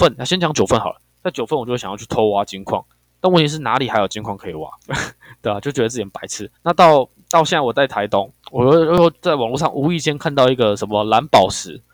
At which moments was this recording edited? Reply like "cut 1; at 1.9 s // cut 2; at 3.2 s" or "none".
cut 1; at 2.9 s // cut 2; at 4.8 s // cut 3; at 6.5 s // cut 4; at 8.4 s